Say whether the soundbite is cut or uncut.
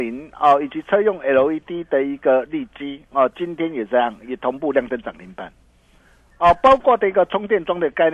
uncut